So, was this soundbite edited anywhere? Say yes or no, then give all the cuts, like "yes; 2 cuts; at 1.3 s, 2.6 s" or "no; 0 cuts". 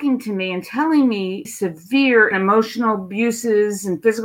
yes; 2 cuts; at 1.4 s, 2.3 s